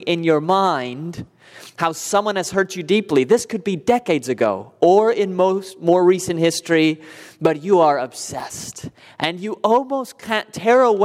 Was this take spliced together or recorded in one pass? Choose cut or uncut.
uncut